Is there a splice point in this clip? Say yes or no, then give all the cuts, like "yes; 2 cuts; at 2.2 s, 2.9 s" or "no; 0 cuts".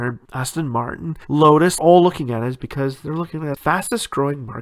yes; 2 cuts; at 1.8 s, 3.5 s